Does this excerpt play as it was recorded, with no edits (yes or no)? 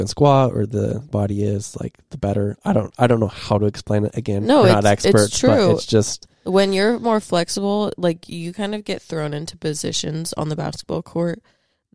no